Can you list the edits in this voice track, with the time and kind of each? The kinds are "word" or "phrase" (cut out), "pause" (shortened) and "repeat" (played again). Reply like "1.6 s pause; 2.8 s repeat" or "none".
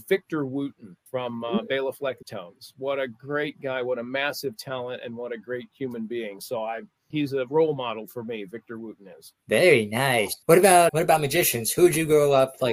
1.1 s pause; 2.2 s phrase; 7.1 s word; 9.4 s pause; 10.4 s pause; 10.9 s word